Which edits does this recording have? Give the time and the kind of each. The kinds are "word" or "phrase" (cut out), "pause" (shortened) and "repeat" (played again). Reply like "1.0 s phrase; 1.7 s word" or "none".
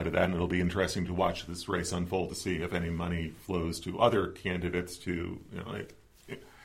none